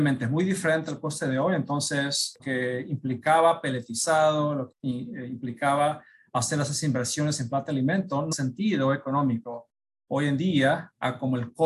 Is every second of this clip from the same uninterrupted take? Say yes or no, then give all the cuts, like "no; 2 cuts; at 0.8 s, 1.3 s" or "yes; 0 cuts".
no; 3 cuts; at 2.4 s, 4.7 s, 8.3 s